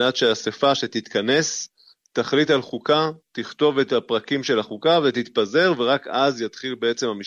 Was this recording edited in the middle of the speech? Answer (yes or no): no